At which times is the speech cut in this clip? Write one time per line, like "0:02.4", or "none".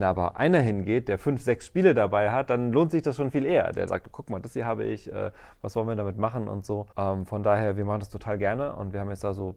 0:03.9
0:06.9